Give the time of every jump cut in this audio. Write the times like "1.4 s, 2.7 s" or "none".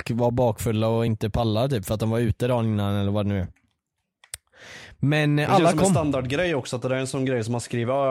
none